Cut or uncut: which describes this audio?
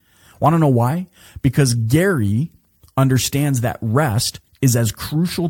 uncut